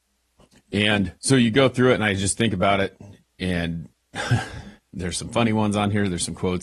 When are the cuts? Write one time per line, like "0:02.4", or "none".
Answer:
0:01.2
0:03.9